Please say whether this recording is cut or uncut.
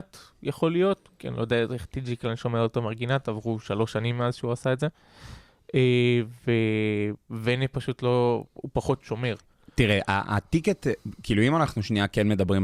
uncut